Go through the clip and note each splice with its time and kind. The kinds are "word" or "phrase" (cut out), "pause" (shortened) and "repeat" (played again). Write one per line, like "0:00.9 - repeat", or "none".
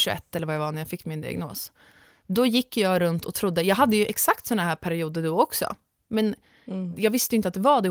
none